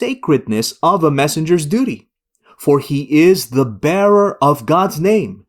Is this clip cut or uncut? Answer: uncut